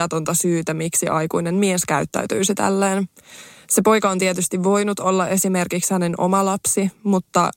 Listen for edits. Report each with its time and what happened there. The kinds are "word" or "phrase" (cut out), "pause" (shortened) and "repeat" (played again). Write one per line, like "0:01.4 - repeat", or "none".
none